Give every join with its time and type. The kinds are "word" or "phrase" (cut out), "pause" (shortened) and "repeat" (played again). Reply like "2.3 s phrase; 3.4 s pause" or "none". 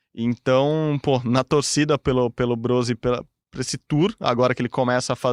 none